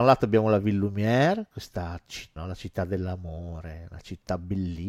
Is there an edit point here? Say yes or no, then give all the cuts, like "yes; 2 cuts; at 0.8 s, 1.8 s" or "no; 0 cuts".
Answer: yes; 1 cut; at 2.4 s